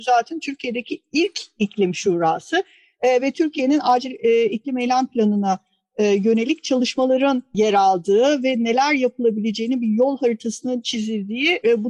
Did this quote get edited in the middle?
no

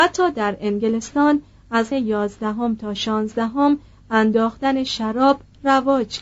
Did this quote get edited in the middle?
yes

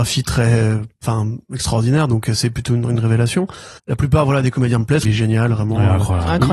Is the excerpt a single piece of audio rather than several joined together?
no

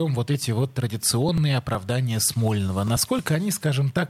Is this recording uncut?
yes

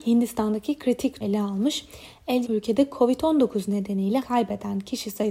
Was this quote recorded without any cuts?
no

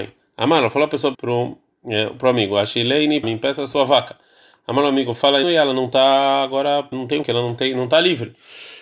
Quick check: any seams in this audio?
yes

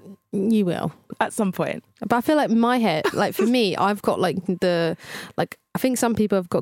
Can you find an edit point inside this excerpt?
no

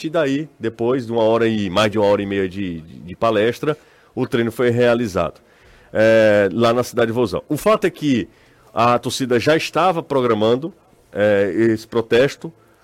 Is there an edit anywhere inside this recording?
no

